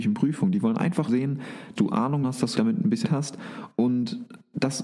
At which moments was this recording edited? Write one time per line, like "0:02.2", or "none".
0:01.1
0:01.8
0:02.2
0:02.5
0:03.0